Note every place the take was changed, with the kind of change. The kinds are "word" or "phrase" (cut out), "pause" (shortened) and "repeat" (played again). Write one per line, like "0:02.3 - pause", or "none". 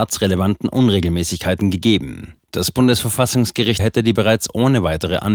0:02.4 - pause
0:03.8 - phrase
0:04.2 - word